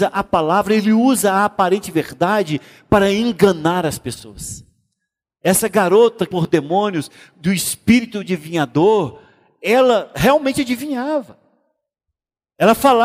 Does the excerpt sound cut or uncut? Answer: cut